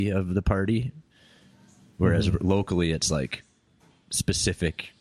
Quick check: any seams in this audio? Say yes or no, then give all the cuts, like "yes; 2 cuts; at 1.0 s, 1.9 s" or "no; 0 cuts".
no; 0 cuts